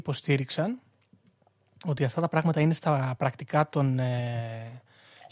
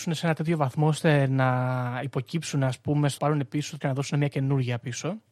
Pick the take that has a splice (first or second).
second